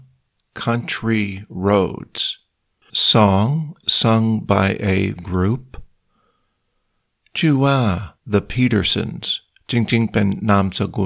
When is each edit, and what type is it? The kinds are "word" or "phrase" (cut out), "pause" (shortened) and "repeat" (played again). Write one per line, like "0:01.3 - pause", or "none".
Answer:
0:02.9 - word
0:03.8 - word
0:05.2 - word
0:08.2 - pause